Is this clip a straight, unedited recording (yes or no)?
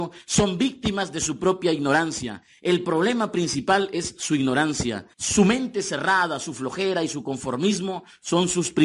no